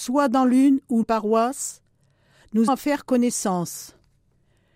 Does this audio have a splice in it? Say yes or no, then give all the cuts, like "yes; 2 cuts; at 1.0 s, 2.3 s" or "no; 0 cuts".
yes; 2 cuts; at 1.0 s, 2.7 s